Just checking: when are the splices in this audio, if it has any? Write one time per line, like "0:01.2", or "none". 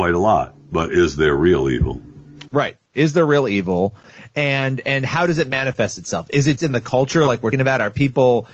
0:06.6
0:07.5